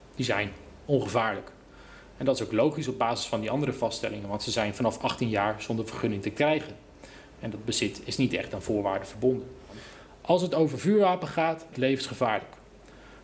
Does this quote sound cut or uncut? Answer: cut